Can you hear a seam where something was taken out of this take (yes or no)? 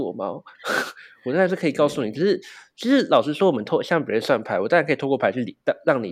no